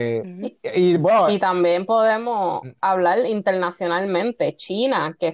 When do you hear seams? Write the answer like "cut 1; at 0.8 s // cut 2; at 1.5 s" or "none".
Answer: none